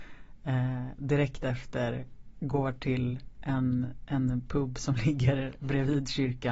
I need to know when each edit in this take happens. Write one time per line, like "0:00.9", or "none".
none